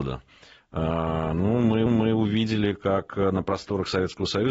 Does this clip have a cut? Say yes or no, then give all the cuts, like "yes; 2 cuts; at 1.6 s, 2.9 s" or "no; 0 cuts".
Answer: yes; 1 cut; at 1.9 s